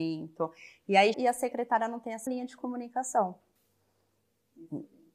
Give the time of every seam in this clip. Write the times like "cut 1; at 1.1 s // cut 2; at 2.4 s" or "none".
cut 1; at 1.1 s // cut 2; at 2.3 s